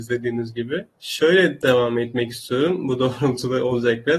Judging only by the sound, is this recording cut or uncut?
cut